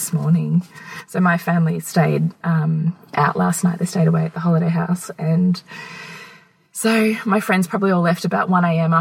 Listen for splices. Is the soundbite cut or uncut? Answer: uncut